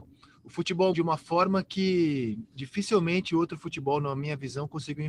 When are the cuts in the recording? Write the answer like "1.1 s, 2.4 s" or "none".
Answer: 0.9 s